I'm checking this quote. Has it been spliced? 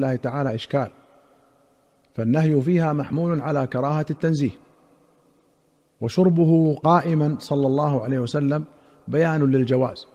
no; 0 cuts

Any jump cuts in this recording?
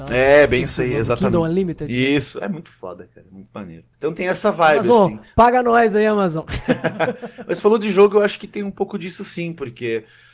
no; 0 cuts

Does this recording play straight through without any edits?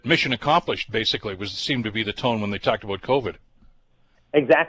yes; 0 cuts

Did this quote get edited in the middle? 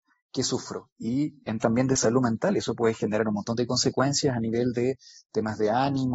yes; 1 cut; at 1.6 s

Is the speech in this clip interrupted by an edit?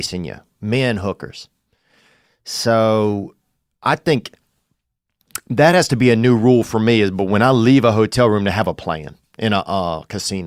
no; 0 cuts

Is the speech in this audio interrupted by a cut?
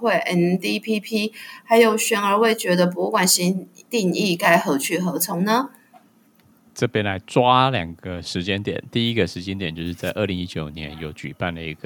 no; 0 cuts

